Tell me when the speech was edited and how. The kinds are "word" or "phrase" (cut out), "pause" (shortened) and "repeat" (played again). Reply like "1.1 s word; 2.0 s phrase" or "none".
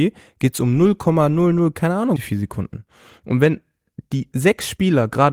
2.2 s word